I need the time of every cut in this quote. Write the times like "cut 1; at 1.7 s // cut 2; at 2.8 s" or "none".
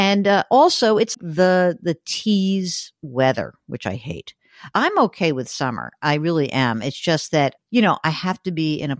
cut 1; at 1.1 s